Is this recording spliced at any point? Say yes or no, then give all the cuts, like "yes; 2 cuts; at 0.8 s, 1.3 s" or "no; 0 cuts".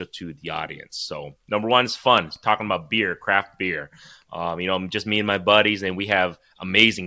no; 0 cuts